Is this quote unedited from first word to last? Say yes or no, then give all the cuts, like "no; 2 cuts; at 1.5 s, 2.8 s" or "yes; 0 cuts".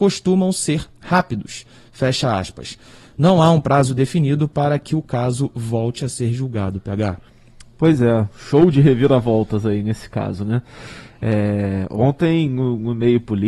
no; 1 cut; at 8.3 s